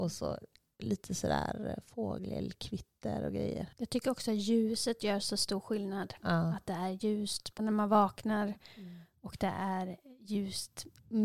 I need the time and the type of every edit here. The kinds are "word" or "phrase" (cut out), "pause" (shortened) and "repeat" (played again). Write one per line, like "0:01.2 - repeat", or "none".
0:03.7 - pause
0:07.6 - word